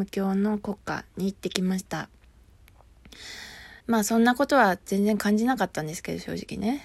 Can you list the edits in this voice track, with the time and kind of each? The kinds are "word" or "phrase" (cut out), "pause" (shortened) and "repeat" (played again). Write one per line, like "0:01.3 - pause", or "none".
0:03.8 - pause